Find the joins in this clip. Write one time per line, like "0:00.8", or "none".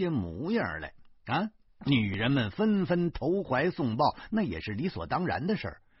0:01.7